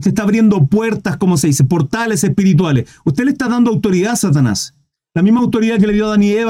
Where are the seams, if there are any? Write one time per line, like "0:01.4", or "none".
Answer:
none